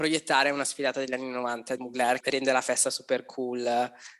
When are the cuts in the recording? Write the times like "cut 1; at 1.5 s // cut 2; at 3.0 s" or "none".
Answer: cut 1; at 1.8 s // cut 2; at 2.2 s